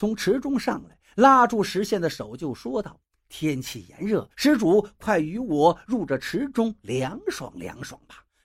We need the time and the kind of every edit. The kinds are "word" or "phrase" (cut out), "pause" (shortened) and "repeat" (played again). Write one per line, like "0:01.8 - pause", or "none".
0:04.3 - pause

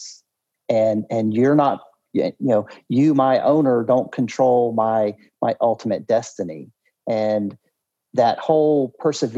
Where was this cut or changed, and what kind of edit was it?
none

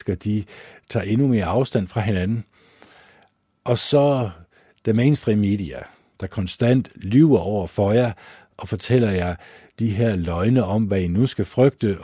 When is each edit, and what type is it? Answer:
none

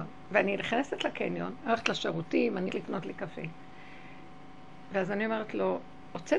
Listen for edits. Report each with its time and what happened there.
0:01.6 - pause
0:02.7 - word

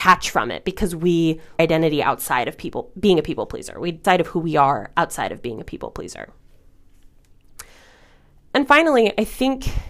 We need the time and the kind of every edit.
0:01.6 - phrase
0:04.0 - word

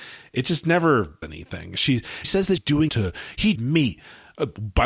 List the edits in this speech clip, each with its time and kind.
0:01.2 - word
0:02.2 - word
0:02.6 - word
0:02.9 - word
0:03.6 - word

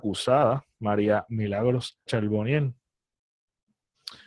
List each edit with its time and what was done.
0:02.1 - word

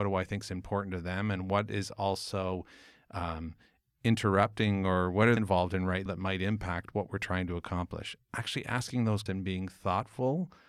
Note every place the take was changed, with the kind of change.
0:05.4 - word
0:06.1 - word
0:09.3 - word

